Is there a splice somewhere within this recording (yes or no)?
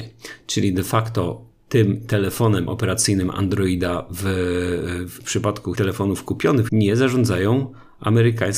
yes